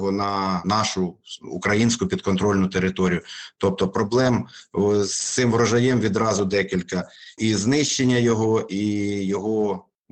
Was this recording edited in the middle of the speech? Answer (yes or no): yes